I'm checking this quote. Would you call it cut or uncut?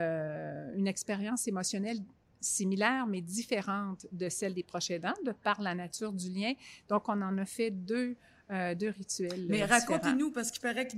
uncut